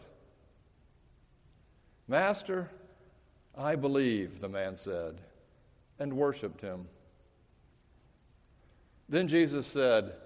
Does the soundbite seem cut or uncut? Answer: uncut